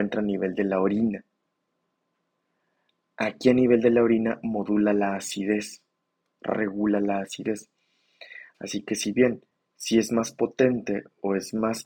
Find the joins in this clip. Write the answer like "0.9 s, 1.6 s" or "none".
none